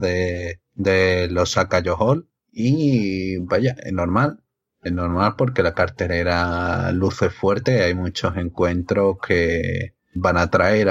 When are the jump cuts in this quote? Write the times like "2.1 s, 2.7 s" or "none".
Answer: none